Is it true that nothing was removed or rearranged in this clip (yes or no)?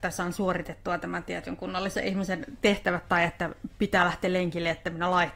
yes